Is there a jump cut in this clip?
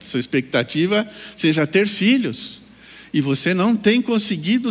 no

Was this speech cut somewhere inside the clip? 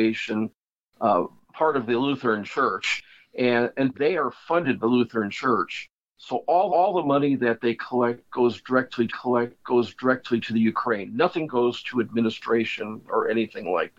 yes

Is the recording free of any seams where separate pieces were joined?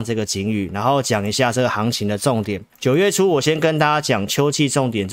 no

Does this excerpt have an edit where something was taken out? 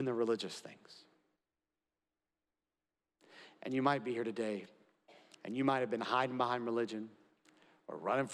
yes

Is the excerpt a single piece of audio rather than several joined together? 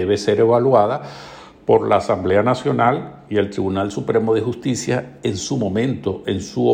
yes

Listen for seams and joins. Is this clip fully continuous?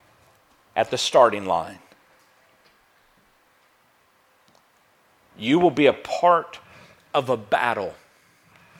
yes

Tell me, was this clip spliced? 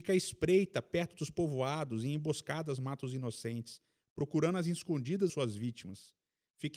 yes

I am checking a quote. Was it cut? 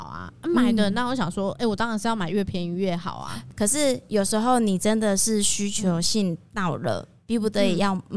no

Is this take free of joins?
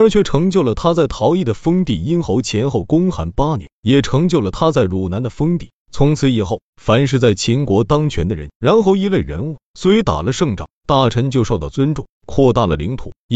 no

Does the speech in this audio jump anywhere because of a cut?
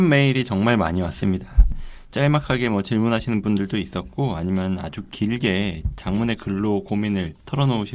no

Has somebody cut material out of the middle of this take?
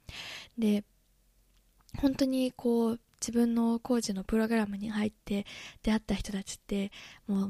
no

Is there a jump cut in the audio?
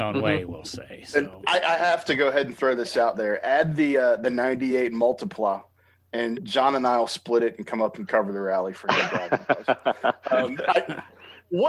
no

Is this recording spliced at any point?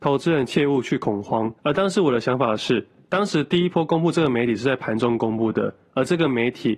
yes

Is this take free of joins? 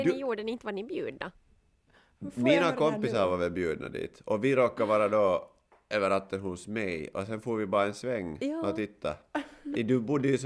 yes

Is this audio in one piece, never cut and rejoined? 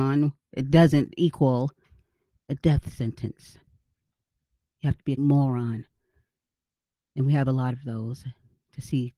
no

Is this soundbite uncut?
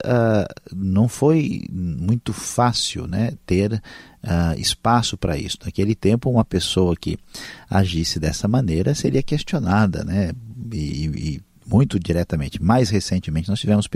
yes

